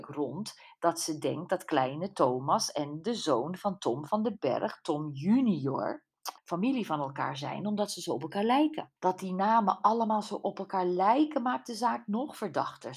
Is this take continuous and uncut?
no; 2 cuts; at 6.4 s, 9.0 s

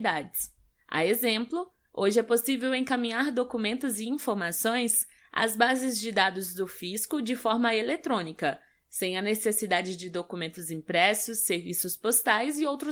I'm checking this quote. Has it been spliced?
no; 0 cuts

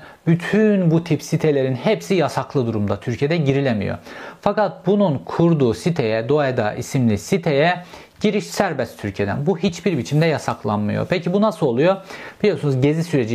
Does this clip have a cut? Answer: no; 0 cuts

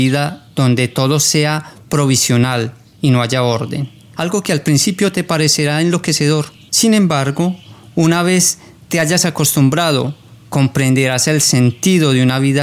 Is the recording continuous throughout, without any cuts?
yes; 0 cuts

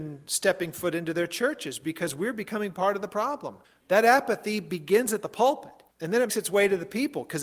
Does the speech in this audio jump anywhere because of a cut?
yes; 3 cuts; at 3.6 s, 5.9 s, 6.3 s

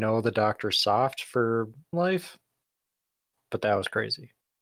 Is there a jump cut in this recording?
yes; 1 cut; at 1.9 s

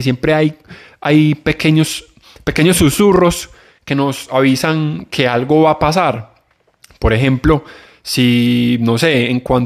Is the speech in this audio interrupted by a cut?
no; 0 cuts

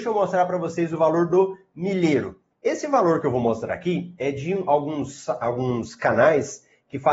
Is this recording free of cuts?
no; 1 cut; at 2.5 s

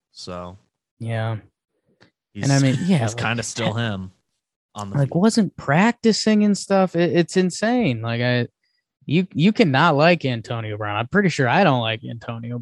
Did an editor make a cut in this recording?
no; 0 cuts

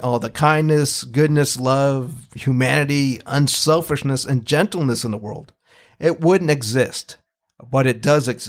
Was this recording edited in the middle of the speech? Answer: no; 0 cuts

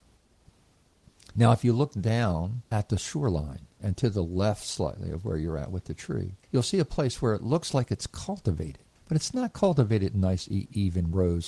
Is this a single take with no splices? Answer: no; 4 cuts; at 2.7 s, 3.7 s, 6.4 s, 9.0 s

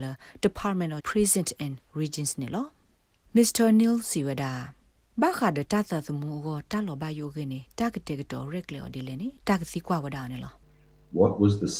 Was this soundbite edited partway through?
yes; 1 cut; at 1.0 s

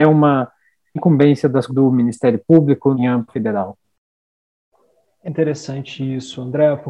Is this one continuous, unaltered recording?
no; 5 cuts; at 1.0 s, 1.7 s, 2.9 s, 3.3 s, 5.2 s

